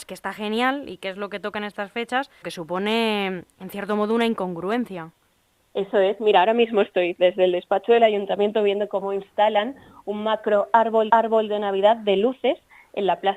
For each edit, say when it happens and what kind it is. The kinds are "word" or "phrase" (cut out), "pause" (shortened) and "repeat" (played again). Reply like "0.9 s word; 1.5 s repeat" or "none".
2.4 s word; 5.2 s pause; 11.1 s repeat